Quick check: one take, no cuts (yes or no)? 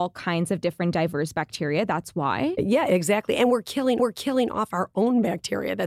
no